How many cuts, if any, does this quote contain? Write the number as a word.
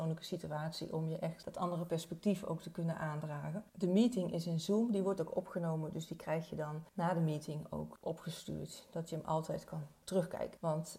zero